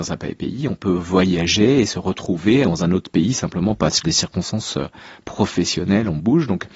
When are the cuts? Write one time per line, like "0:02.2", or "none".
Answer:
0:02.6
0:04.0